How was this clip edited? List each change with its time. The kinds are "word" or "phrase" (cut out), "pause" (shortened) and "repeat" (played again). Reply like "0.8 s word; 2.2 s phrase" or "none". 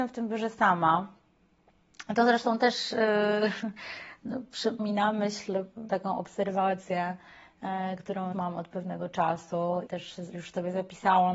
4.8 s word; 5.9 s word; 8.3 s word; 9.9 s word